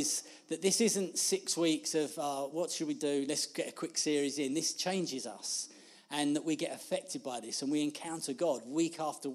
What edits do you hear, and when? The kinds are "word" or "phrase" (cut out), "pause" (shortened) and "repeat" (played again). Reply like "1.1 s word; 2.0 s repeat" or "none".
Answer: none